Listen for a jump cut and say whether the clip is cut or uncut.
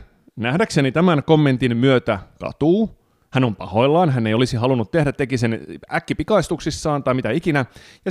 uncut